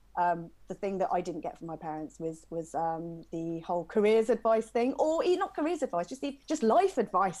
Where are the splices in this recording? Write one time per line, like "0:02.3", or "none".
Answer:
0:06.4

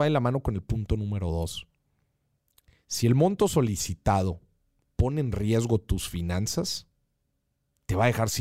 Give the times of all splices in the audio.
none

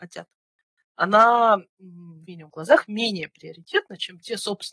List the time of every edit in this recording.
0:02.2

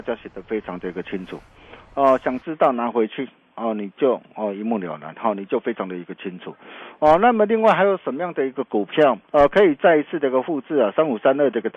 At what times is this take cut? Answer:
0:09.2

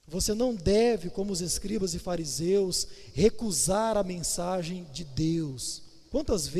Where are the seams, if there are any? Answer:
none

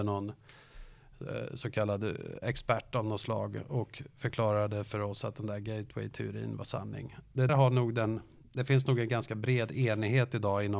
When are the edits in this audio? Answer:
0:07.5

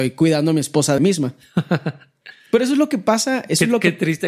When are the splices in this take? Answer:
0:01.0

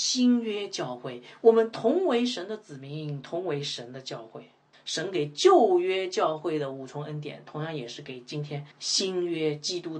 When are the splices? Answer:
0:04.7
0:08.7

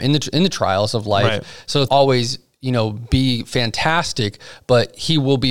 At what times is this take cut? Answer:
0:01.9

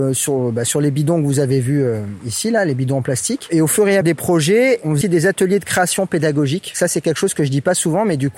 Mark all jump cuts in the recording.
0:04.0
0:05.0

